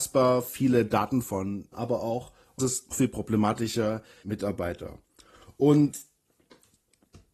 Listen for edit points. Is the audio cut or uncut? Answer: cut